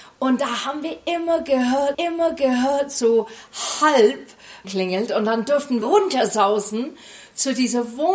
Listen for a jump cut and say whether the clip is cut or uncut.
cut